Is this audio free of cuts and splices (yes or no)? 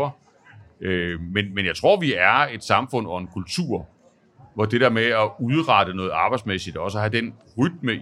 yes